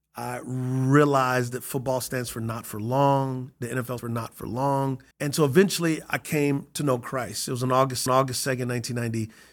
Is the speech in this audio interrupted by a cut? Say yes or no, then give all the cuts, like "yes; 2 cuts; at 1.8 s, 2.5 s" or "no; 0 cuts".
yes; 3 cuts; at 4.0 s, 5.1 s, 8.1 s